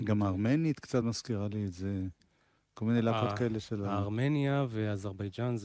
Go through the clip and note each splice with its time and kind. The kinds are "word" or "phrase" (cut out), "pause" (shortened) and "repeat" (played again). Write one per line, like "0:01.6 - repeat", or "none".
none